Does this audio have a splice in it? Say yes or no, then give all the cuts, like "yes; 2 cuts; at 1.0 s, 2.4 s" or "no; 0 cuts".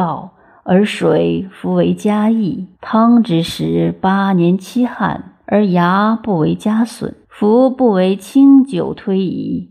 yes; 3 cuts; at 2.7 s, 5.4 s, 7.2 s